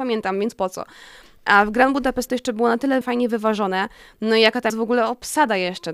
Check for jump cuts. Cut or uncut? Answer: cut